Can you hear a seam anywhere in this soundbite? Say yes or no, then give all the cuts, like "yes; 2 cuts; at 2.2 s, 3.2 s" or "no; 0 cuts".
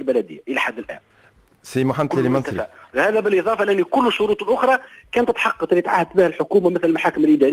no; 0 cuts